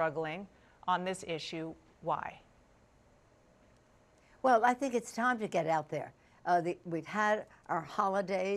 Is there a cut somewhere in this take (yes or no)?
no